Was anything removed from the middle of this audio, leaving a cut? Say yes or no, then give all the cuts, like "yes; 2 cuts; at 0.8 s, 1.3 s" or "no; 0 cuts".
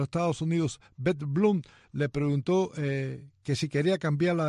no; 0 cuts